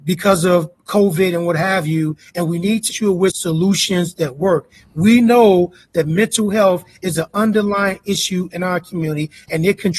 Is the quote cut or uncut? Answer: cut